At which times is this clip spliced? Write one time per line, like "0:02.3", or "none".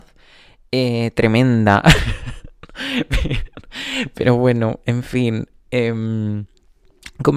none